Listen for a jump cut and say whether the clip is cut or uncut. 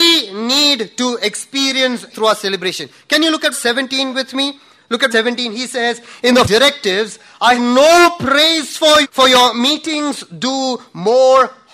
cut